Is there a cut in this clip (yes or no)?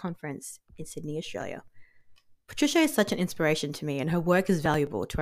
no